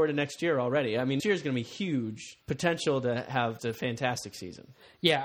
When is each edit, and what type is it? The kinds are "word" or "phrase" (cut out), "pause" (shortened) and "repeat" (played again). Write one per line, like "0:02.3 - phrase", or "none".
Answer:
0:01.2 - word
0:02.4 - pause
0:03.6 - word